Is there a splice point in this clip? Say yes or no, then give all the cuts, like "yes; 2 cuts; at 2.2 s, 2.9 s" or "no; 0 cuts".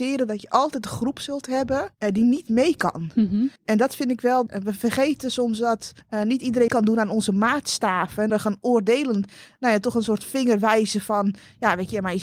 yes; 6 cuts; at 1.9 s, 3.6 s, 4.5 s, 6.0 s, 6.7 s, 8.3 s